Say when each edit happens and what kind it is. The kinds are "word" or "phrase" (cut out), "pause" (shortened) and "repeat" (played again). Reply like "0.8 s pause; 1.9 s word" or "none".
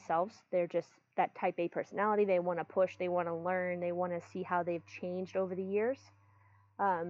none